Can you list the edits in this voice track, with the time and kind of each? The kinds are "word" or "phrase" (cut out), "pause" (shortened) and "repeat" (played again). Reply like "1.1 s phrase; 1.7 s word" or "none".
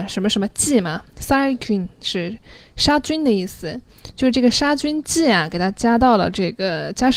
none